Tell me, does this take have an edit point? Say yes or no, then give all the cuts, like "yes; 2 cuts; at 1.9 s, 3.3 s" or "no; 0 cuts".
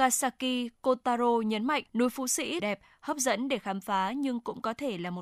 yes; 2 cuts; at 1.9 s, 2.6 s